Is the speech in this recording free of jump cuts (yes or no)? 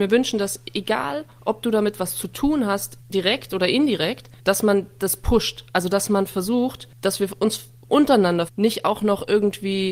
no